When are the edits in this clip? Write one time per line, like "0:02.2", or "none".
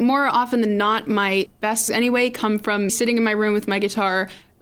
0:01.9
0:02.9